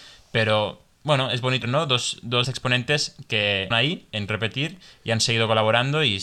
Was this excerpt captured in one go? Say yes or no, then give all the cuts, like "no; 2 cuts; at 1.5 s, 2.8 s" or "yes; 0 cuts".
no; 4 cuts; at 1.6 s, 2.4 s, 3.7 s, 4.3 s